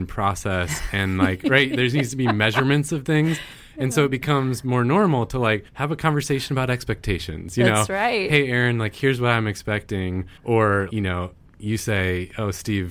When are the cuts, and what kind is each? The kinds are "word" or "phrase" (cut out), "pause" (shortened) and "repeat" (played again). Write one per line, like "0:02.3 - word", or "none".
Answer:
0:05.7 - pause
0:10.4 - pause